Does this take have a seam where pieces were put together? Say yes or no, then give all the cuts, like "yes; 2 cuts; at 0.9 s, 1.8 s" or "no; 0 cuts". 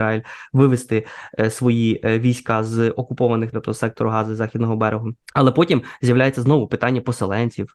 yes; 2 cuts; at 3.5 s, 5.2 s